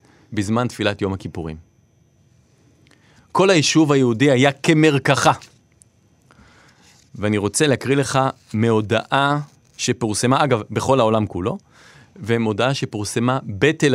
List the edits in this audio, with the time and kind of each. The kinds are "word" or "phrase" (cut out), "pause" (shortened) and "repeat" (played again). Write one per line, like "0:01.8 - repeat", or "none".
none